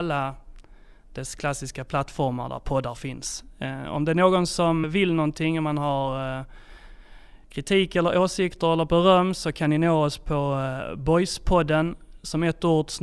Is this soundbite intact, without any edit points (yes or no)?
no